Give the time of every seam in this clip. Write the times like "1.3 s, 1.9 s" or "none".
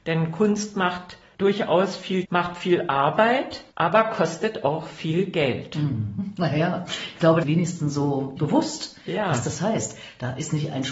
2.2 s, 3.7 s, 7.4 s, 8.4 s